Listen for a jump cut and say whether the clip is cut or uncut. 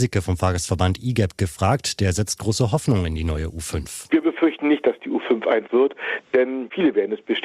cut